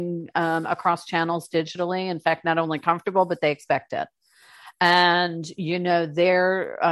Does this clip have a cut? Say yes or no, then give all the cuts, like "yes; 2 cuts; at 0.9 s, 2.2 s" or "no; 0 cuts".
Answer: no; 0 cuts